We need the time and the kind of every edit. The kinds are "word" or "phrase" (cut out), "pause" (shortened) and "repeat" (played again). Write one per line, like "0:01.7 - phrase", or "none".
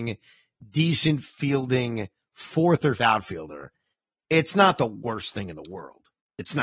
0:03.0 - word